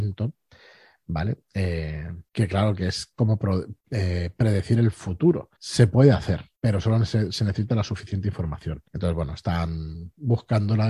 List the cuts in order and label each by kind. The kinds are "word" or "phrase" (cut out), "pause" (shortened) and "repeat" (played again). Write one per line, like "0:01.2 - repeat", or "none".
0:02.3 - pause
0:03.8 - pause
0:05.5 - pause
0:06.5 - pause
0:08.9 - pause